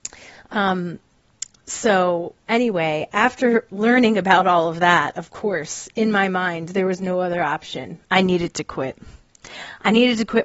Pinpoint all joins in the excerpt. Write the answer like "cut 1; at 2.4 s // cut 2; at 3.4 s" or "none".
cut 1; at 2.4 s // cut 2; at 8.0 s